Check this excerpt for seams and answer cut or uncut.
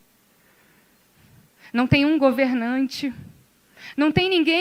uncut